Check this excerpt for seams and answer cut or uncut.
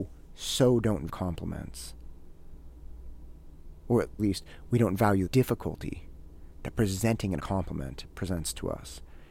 cut